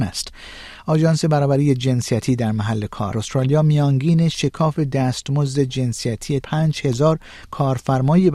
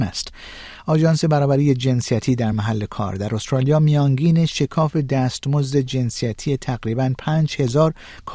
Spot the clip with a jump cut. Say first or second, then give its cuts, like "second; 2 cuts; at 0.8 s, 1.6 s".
first; 2 cuts; at 3.1 s, 6.4 s